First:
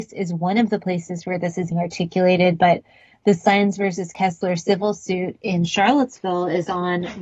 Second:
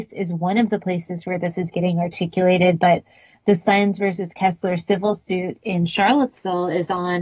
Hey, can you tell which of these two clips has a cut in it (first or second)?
first